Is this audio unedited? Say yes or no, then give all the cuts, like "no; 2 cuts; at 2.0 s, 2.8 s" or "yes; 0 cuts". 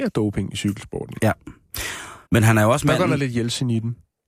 no; 1 cut; at 2.3 s